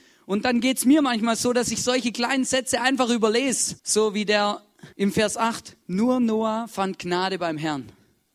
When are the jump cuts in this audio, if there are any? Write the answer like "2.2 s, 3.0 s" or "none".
3.8 s, 4.9 s, 5.8 s